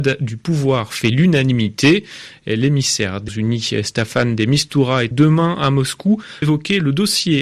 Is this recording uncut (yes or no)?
no